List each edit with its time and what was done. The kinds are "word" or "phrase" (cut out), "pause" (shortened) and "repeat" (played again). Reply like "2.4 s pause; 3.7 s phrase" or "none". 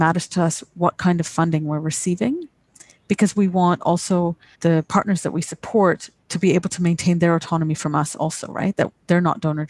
4.5 s word